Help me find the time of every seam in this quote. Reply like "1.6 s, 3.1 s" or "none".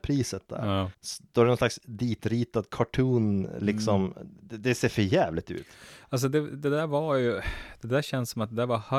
0.9 s